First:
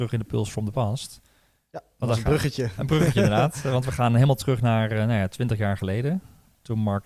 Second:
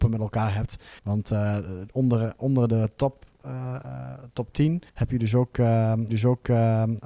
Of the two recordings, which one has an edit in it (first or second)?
second